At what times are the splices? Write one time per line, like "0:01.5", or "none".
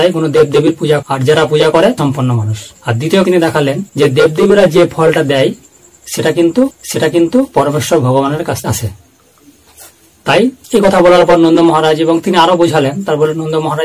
0:01.0
0:02.0
0:02.8
0:03.2
0:03.9
0:06.7
0:08.6
0:10.6